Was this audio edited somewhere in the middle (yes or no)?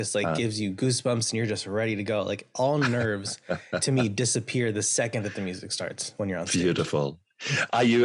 no